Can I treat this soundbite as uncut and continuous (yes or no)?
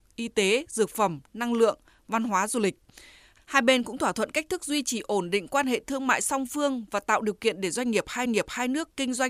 no